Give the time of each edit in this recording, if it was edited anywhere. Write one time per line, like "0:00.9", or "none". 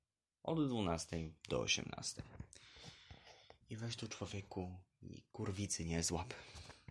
0:03.6